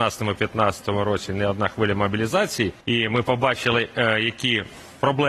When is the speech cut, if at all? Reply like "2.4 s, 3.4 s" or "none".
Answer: 2.8 s